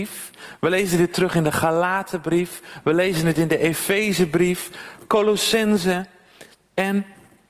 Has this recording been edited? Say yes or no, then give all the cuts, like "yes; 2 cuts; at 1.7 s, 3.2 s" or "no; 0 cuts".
no; 0 cuts